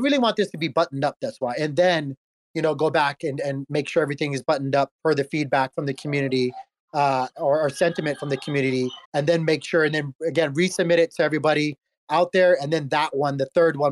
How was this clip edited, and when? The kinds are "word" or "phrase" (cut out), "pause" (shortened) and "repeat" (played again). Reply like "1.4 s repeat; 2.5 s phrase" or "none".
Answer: 9.1 s pause